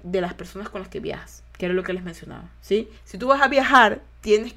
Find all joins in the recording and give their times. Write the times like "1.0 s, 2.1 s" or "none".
3.0 s